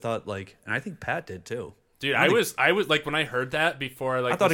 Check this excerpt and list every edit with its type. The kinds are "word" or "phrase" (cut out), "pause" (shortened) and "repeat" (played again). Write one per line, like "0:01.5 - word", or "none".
none